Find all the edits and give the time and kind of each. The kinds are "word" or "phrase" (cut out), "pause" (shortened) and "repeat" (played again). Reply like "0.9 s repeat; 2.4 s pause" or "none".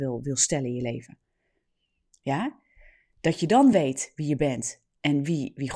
none